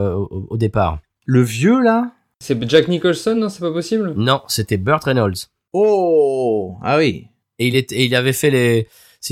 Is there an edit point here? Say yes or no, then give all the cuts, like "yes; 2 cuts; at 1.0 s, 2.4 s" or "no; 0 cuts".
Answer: no; 0 cuts